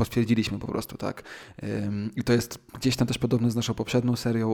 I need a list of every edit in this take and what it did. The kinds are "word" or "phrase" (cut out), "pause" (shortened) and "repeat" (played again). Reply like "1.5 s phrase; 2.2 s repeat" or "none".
none